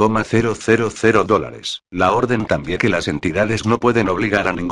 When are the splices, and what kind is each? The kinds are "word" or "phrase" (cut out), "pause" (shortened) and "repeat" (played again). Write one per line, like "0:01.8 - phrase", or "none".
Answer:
0:01.9 - pause
0:02.8 - word
0:03.6 - word